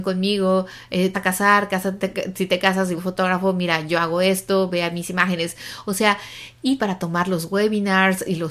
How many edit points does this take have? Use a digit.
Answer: 3